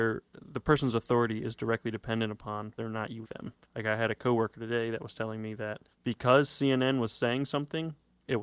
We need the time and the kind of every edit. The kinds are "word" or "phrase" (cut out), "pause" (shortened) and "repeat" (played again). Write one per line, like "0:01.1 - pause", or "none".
0:02.8 - word
0:03.2 - word
0:03.6 - pause
0:05.9 - pause